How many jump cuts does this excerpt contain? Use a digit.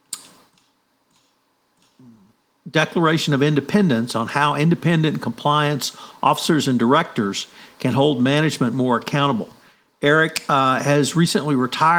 0